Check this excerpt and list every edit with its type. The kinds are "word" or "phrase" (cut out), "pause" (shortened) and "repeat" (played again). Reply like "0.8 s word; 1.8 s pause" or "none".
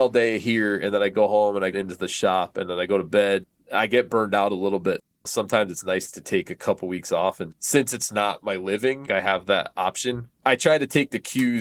1.7 s phrase; 7.5 s word; 10.3 s pause